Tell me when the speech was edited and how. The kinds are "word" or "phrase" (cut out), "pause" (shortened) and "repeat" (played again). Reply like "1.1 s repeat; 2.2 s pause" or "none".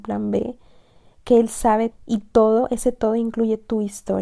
1.9 s word